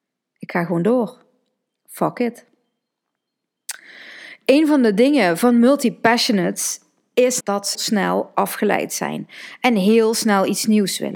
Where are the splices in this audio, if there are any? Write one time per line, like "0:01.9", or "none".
0:07.4
0:07.7